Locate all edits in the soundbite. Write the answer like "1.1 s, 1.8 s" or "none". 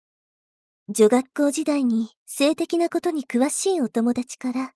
2.2 s